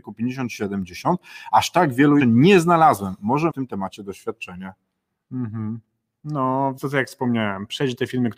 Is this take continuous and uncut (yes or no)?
no